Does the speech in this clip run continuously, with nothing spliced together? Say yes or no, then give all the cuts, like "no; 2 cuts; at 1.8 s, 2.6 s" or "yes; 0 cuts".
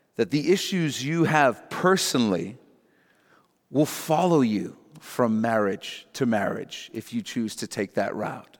yes; 0 cuts